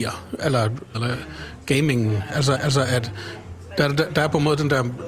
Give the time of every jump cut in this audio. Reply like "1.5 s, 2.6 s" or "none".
0.9 s, 2.6 s